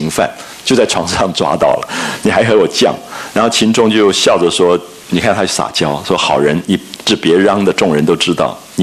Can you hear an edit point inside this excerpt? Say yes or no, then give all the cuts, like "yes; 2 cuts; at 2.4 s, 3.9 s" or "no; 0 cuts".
no; 0 cuts